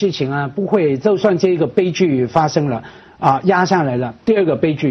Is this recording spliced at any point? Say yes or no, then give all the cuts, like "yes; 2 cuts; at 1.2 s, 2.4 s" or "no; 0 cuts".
no; 0 cuts